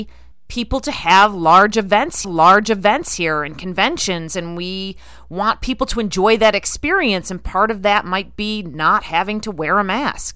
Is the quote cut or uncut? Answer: cut